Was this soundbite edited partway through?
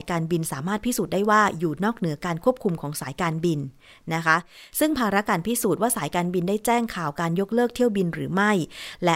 no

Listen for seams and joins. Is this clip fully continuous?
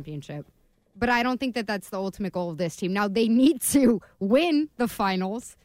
yes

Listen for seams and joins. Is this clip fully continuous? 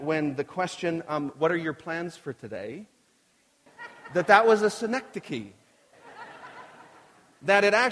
yes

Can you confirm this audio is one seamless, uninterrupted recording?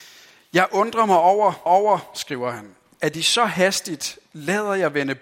no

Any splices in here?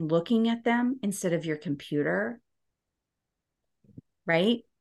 no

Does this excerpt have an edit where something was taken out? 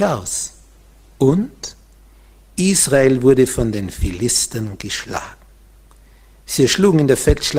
no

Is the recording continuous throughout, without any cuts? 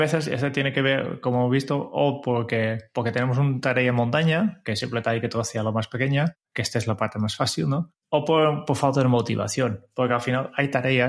no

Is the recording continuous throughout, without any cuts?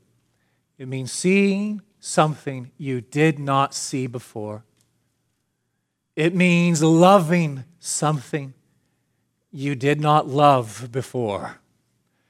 yes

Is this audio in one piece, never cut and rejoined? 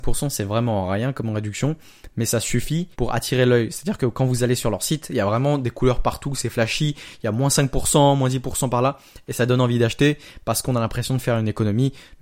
no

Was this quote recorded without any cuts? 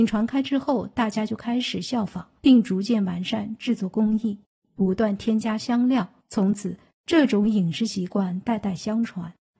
no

